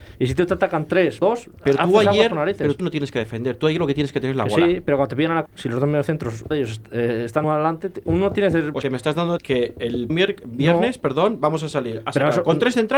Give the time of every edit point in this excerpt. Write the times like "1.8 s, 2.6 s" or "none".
1.2 s, 2.8 s, 5.5 s, 6.5 s, 7.4 s, 8.8 s, 9.4 s, 10.1 s